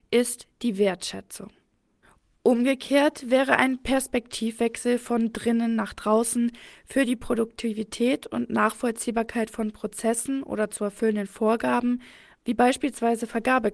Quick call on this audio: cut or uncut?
uncut